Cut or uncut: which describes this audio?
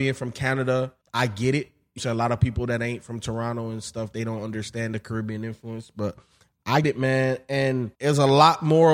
cut